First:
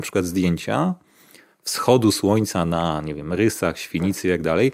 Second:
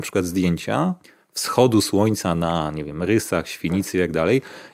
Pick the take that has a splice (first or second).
second